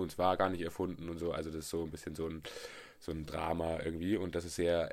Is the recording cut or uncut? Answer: uncut